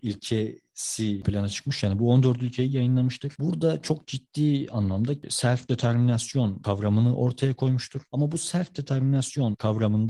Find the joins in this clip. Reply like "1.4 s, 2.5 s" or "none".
1.2 s